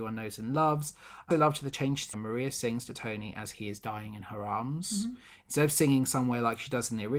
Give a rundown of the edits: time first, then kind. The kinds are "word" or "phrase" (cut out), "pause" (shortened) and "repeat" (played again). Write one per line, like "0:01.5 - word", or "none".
0:01.3 - word
0:02.1 - phrase